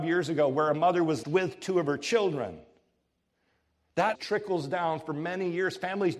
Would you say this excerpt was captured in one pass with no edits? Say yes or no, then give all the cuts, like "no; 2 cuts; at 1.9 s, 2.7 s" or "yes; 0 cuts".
no; 2 cuts; at 1.2 s, 4.1 s